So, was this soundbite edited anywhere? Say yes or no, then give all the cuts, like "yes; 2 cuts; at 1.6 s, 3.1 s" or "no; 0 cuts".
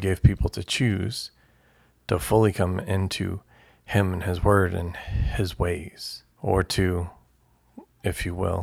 yes; 1 cut; at 6.3 s